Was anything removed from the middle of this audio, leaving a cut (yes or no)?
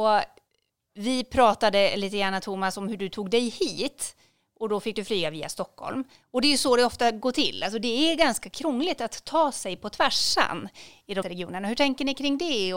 yes